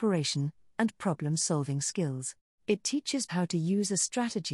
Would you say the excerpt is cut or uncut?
cut